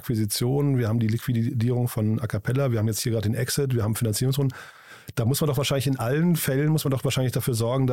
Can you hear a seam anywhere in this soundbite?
no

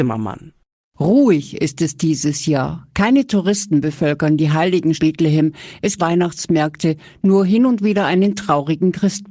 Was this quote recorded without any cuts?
no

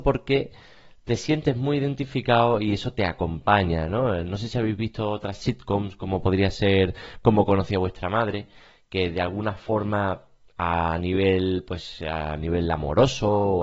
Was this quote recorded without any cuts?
yes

